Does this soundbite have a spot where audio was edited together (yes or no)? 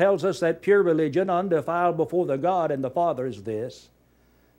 no